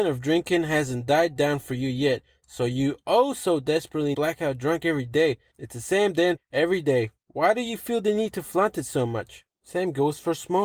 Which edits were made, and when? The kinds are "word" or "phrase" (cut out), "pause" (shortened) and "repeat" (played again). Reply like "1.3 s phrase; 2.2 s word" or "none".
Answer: 4.1 s phrase; 6.4 s word